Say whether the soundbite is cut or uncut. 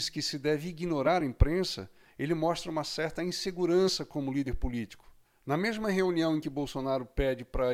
uncut